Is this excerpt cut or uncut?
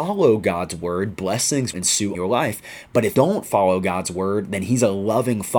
cut